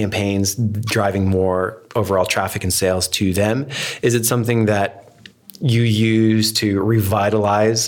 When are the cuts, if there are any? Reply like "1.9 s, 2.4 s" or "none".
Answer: none